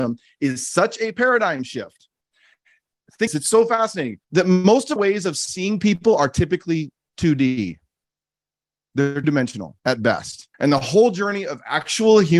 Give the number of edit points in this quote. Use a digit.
6